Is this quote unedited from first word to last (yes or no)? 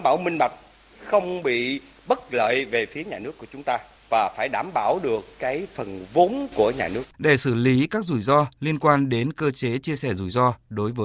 no